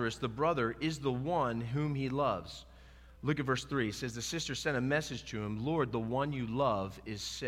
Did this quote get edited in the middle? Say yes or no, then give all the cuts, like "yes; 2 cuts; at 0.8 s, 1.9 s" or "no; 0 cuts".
yes; 1 cut; at 3.2 s